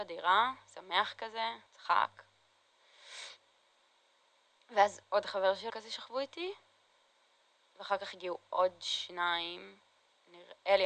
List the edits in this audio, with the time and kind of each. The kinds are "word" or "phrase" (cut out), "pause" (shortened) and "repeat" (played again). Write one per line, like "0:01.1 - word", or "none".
0:01.7 - pause
0:05.0 - pause
0:05.7 - phrase